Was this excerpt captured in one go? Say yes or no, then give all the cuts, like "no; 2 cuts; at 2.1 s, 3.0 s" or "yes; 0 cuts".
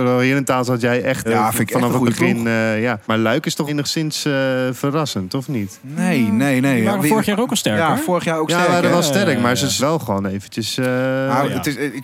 no; 4 cuts; at 1.3 s, 3.0 s, 3.7 s, 9.8 s